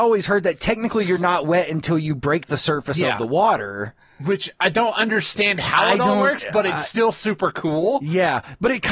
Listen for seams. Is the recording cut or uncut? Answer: uncut